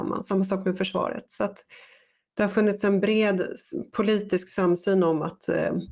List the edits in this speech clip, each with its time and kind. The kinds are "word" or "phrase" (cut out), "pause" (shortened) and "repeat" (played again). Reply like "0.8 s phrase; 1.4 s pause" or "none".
none